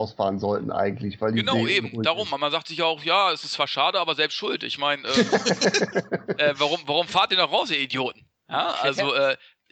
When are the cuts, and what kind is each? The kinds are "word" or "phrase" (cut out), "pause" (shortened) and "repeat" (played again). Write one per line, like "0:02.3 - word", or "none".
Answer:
none